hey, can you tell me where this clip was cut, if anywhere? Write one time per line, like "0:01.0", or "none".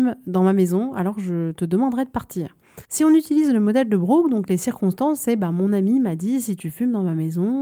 0:02.8